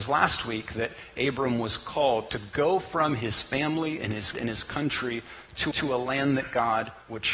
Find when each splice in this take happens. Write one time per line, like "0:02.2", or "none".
0:02.3
0:04.3
0:05.7